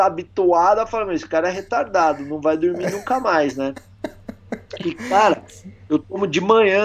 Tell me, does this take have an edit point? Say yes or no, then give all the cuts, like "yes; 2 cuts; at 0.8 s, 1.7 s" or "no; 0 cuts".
no; 0 cuts